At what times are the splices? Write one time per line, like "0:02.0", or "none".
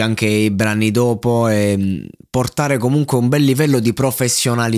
none